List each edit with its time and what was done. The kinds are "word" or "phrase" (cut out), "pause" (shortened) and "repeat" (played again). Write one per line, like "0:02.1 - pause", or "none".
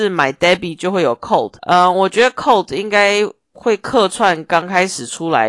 0:01.6 - pause

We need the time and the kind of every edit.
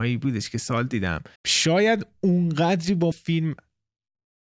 0:01.4 - pause
0:03.1 - word

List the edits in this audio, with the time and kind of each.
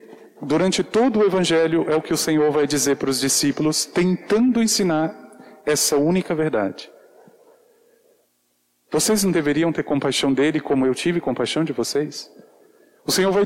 none

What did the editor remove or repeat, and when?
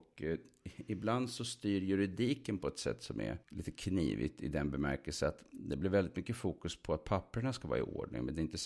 0:03.4 - pause

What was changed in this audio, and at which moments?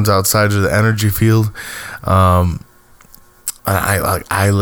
0:03.6 - pause

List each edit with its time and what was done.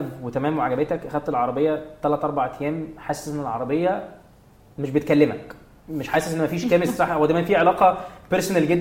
none

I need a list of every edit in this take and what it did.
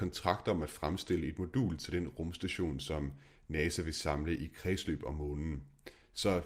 none

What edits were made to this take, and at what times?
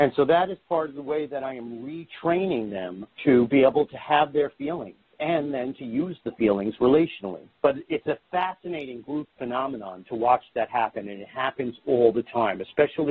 0:07.5 - pause
0:08.2 - pause

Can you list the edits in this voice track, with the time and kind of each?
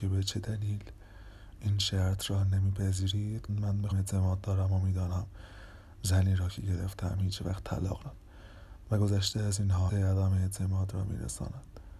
0:03.5 - phrase
0:03.9 - word
0:08.0 - word
0:09.9 - phrase

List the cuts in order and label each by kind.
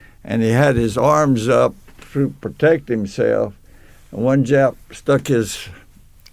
none

